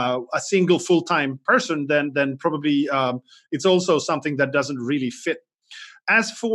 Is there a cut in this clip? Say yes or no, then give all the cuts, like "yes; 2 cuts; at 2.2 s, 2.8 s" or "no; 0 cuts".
no; 0 cuts